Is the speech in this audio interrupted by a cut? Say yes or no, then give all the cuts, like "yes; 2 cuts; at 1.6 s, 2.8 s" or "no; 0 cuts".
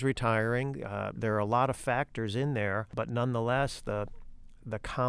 yes; 1 cut; at 1.2 s